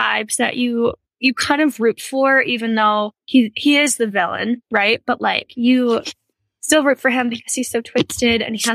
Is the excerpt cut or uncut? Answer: cut